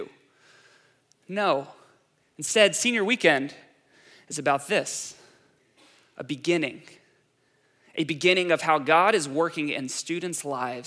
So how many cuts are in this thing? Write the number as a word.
zero